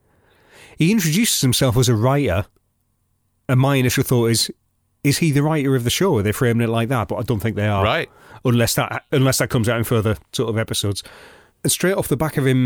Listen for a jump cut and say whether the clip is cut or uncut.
uncut